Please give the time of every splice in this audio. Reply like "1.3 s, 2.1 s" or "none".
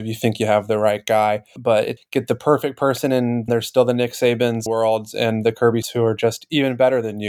1.6 s, 2.0 s, 3.5 s, 4.7 s, 5.8 s

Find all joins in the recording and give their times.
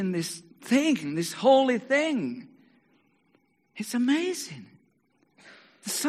none

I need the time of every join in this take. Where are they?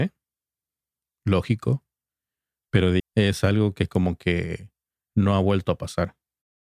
3.0 s

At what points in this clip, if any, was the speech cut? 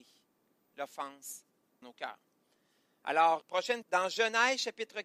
1.8 s, 3.4 s, 3.8 s

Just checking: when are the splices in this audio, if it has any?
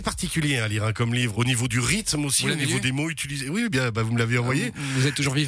1.3 s

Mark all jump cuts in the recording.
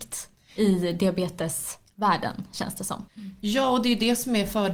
3.1 s

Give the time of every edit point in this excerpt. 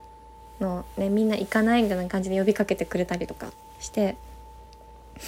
none

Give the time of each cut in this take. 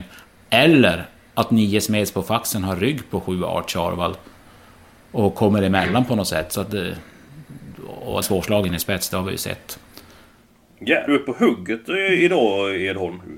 8.2 s, 11.1 s

